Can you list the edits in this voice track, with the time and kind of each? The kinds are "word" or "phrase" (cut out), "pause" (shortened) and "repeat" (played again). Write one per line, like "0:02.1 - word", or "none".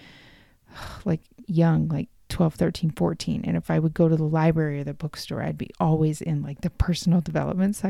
none